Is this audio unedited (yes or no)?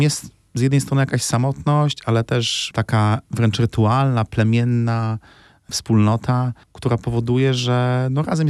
no